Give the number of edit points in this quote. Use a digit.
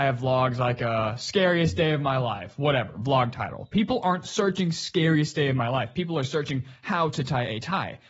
0